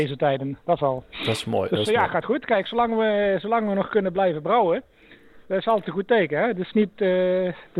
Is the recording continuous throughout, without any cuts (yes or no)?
yes